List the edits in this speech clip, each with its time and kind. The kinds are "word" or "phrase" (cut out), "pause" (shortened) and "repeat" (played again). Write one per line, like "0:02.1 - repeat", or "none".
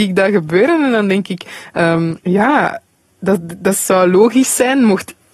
0:02.2 - pause